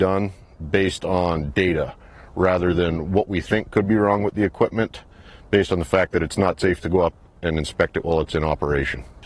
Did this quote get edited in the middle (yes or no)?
no